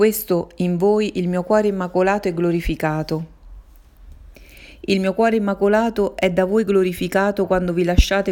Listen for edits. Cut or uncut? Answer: uncut